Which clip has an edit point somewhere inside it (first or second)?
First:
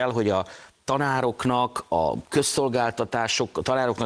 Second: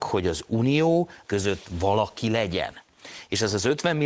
second